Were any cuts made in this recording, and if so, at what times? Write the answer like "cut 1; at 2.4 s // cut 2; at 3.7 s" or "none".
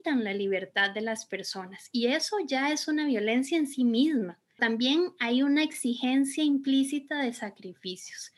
cut 1; at 4.6 s

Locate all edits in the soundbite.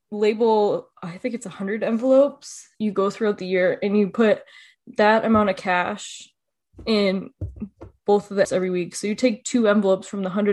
cut 1; at 0.9 s // cut 2; at 2.7 s // cut 3; at 8.4 s

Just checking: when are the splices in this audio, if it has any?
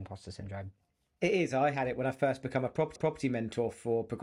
cut 1; at 3.0 s

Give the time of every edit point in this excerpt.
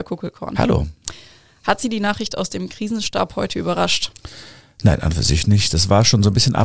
none

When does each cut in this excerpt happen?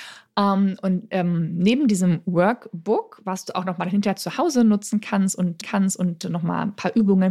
cut 1; at 5.6 s

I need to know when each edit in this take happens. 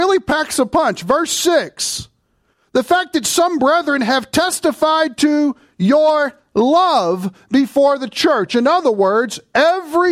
none

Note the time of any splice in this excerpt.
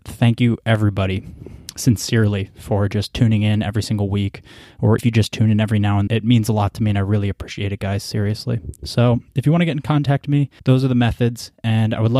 cut 1; at 5.0 s // cut 2; at 6.1 s // cut 3; at 10.6 s

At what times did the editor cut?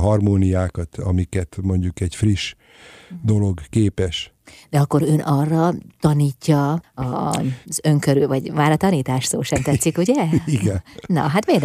cut 1; at 7.6 s

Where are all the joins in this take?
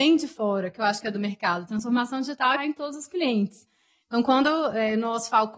cut 1; at 2.6 s

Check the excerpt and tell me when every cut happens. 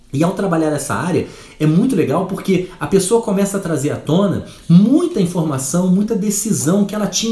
none

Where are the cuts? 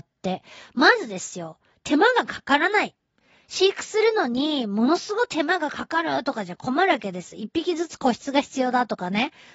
none

